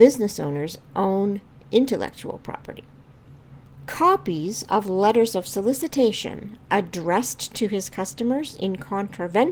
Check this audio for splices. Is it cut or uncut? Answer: uncut